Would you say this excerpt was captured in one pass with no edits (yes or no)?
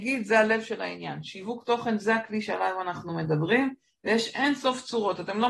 yes